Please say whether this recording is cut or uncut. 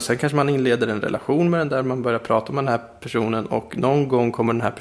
uncut